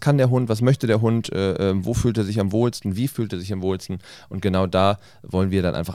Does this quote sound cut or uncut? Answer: uncut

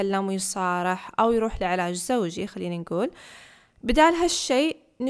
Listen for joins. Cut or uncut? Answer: uncut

